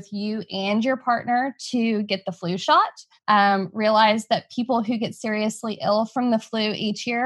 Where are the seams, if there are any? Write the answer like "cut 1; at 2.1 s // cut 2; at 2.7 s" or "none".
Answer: none